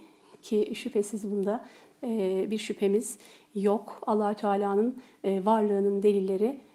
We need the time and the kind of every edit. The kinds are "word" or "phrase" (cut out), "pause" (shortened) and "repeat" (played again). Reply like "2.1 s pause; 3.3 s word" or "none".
none